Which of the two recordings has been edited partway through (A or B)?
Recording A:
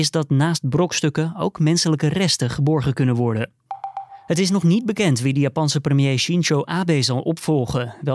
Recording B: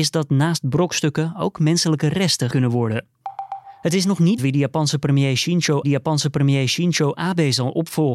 B